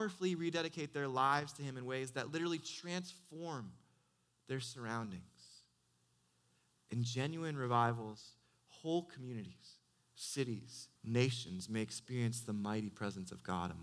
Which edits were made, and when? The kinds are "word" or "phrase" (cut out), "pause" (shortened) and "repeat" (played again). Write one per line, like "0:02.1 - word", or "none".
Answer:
0:11.0 - pause